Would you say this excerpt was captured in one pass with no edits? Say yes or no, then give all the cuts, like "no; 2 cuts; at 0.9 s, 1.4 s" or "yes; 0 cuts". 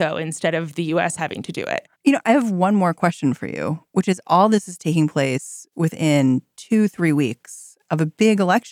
no; 1 cut; at 1.9 s